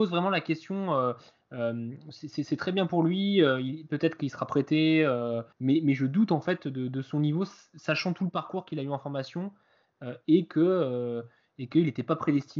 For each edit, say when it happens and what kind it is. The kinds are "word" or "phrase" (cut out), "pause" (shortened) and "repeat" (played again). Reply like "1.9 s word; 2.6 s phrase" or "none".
5.5 s pause